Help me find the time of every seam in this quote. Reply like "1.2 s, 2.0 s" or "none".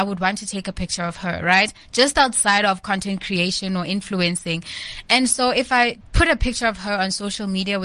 6.0 s